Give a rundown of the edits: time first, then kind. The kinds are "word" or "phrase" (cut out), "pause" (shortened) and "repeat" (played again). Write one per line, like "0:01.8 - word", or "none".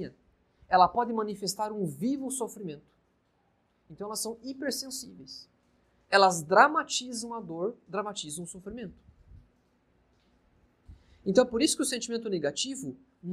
none